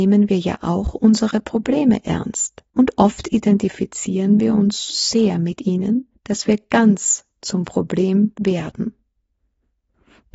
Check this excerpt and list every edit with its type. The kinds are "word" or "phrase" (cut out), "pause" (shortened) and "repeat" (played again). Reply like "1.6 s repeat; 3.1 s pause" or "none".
2.7 s pause; 4.9 s word; 6.1 s pause